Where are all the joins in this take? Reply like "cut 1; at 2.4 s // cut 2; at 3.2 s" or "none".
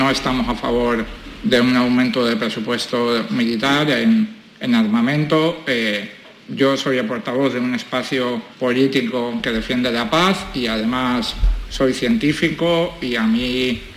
cut 1; at 8.5 s